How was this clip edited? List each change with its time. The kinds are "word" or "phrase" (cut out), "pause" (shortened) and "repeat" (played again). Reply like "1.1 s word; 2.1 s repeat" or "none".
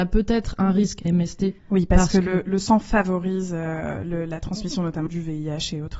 1.1 s phrase; 1.6 s pause; 5.1 s word

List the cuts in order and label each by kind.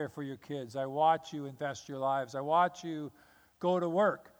none

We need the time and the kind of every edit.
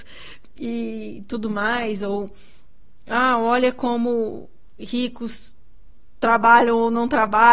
none

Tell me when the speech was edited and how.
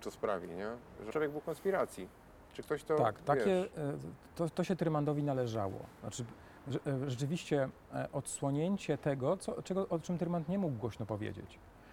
1.1 s phrase

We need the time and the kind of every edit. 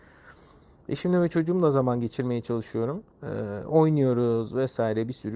3.1 s pause

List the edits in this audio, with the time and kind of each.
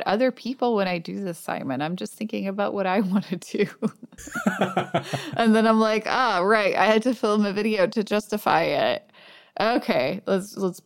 none

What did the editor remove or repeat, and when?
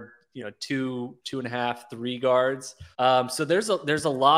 2.9 s pause

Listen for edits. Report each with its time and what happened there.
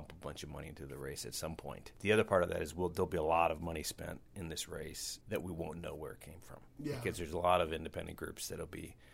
5.2 s word

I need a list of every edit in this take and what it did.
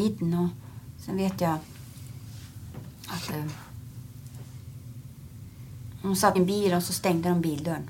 6.4 s word

